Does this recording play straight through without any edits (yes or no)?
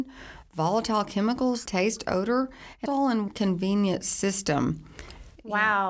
no